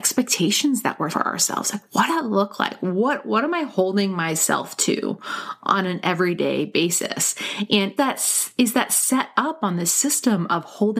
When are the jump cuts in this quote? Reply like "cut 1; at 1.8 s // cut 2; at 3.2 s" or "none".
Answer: cut 1; at 1.1 s // cut 2; at 2.1 s // cut 3; at 8.0 s